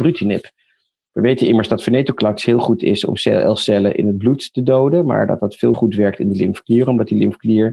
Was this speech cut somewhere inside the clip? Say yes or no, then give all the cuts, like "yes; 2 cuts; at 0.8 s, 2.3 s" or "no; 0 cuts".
yes; 1 cut; at 5.7 s